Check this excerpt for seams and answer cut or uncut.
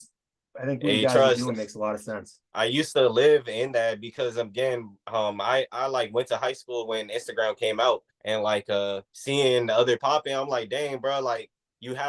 cut